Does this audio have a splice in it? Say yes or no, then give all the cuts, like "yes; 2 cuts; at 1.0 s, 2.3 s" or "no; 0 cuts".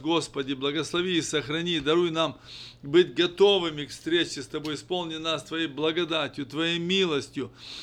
no; 0 cuts